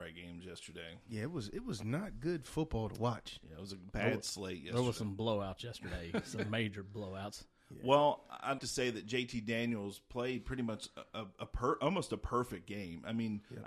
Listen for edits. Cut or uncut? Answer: cut